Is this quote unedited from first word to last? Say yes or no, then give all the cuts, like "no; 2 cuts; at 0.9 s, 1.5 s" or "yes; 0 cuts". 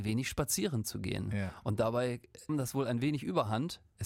no; 1 cut; at 2.5 s